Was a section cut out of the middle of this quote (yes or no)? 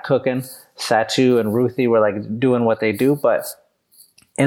no